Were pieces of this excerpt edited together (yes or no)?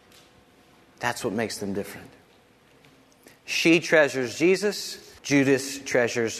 yes